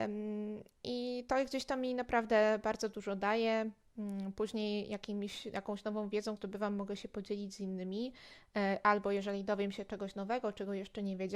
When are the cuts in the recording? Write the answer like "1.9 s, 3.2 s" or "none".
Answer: 6.4 s